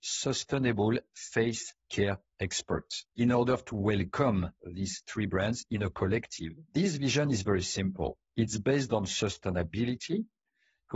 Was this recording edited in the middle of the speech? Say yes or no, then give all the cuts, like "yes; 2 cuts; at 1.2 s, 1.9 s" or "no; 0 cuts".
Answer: yes; 2 cuts; at 3.1 s, 6.7 s